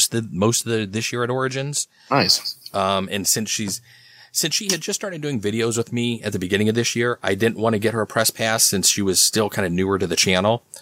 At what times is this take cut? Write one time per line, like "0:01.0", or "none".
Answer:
none